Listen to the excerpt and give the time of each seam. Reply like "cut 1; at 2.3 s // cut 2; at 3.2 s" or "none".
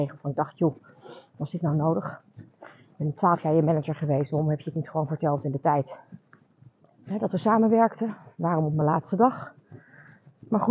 none

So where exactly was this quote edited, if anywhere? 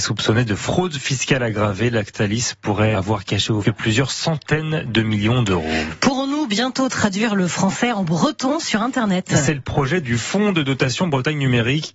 cut 1; at 2.9 s // cut 2; at 3.6 s

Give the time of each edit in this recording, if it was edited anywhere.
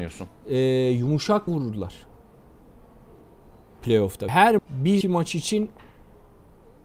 cut 1; at 1.5 s // cut 2; at 4.3 s // cut 3; at 4.6 s // cut 4; at 5.0 s

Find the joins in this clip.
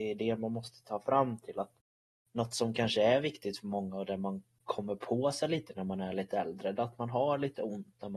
none

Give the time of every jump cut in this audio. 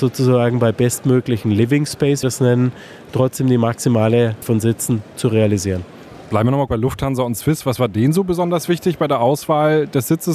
cut 1; at 2.2 s // cut 2; at 4.4 s // cut 3; at 6.7 s

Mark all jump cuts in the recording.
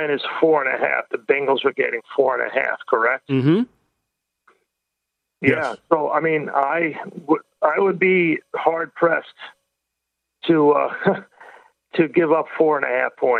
none

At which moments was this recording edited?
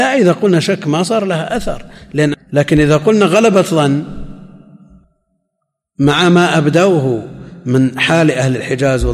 cut 1; at 2.3 s

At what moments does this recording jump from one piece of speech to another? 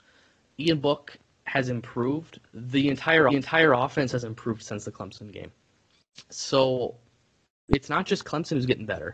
cut 1; at 3.3 s

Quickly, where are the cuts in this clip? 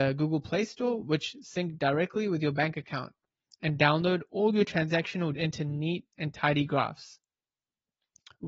cut 1; at 5.3 s

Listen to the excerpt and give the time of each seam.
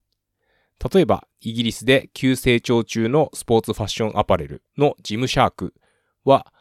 cut 1; at 4.7 s

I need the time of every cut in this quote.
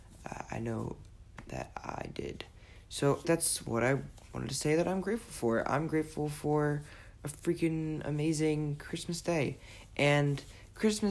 cut 1; at 3.2 s

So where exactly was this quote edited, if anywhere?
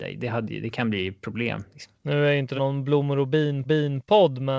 cut 1; at 2.0 s // cut 2; at 2.6 s // cut 3; at 3.6 s

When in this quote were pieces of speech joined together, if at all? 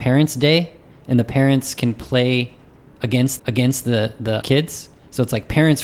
cut 1; at 3.4 s // cut 2; at 4.4 s

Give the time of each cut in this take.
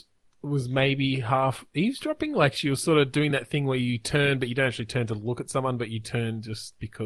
none

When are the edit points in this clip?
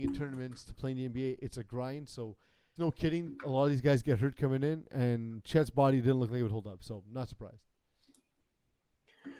cut 1; at 2.8 s

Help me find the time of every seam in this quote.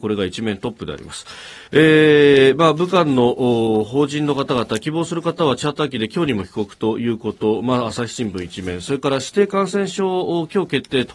cut 1; at 1.7 s

